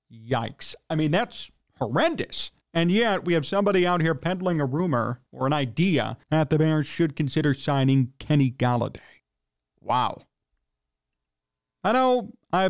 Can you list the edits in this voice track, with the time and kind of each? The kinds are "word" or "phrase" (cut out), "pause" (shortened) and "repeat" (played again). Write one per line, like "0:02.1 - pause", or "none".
0:02.6 - pause
0:05.3 - pause
0:06.2 - pause
0:09.2 - pause